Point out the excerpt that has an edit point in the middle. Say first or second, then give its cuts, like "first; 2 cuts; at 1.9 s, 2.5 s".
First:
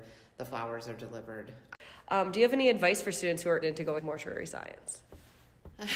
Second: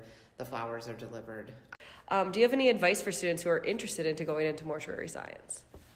first; 2 cuts; at 3.6 s, 4.0 s